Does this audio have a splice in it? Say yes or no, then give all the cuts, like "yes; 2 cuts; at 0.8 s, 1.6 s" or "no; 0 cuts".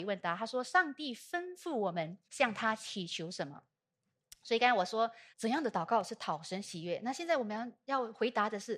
yes; 2 cuts; at 2.2 s, 5.3 s